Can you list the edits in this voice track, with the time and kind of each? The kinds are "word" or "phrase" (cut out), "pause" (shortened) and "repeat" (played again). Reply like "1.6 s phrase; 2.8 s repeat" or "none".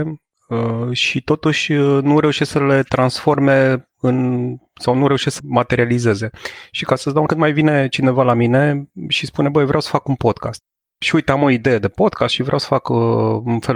5.4 s word; 7.3 s phrase; 10.8 s pause

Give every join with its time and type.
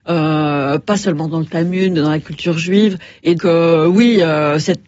3.4 s word

